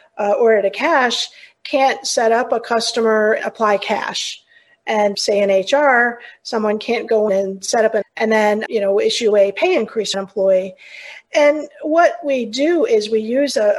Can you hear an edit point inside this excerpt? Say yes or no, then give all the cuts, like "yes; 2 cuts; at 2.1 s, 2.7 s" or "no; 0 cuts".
yes; 6 cuts; at 3.4 s, 5.1 s, 7.3 s, 8.0 s, 8.7 s, 10.1 s